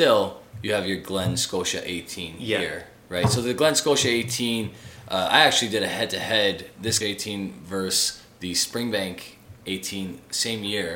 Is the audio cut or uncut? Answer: cut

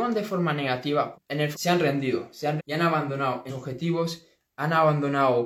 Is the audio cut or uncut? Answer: cut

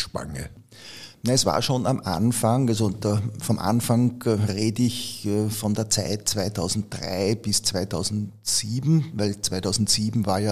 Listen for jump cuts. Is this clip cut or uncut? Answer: uncut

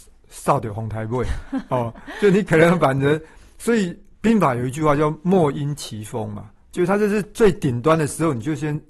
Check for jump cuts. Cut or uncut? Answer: uncut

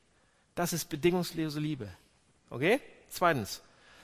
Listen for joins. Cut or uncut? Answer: uncut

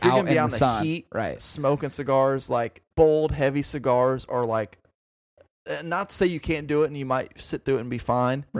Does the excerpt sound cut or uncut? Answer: cut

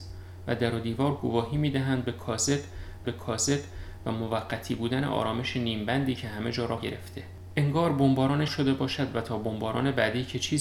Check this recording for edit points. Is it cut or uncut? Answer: cut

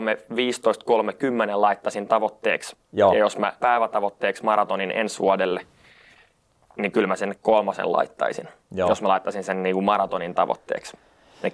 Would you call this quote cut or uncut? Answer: cut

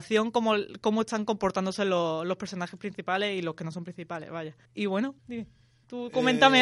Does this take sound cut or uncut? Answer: cut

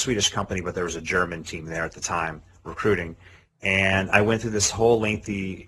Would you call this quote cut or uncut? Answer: uncut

